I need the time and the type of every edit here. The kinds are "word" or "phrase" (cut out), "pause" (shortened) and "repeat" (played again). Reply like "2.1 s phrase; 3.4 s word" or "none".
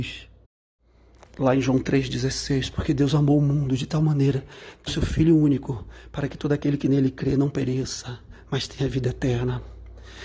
4.9 s word